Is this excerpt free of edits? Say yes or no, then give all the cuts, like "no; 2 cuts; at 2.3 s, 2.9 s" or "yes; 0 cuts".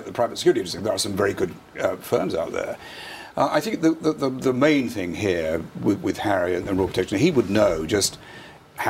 yes; 0 cuts